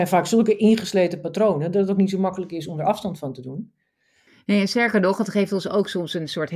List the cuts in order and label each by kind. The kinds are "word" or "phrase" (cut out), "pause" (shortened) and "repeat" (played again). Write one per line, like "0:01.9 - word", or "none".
none